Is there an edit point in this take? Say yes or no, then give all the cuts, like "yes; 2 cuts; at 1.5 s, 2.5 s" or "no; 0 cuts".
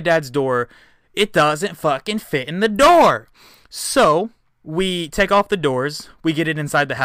yes; 1 cut; at 4.5 s